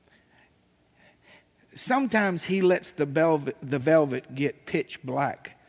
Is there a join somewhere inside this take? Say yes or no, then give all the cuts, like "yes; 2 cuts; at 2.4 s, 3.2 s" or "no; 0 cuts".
no; 0 cuts